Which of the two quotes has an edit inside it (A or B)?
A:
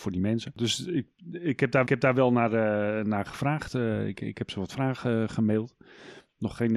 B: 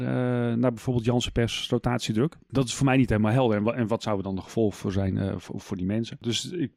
A